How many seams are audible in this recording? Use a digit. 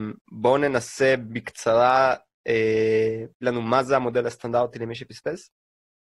1